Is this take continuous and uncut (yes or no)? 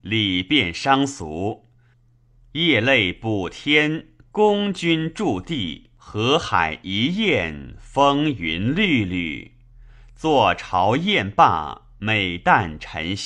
no